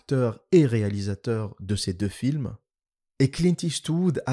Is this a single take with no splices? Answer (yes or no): yes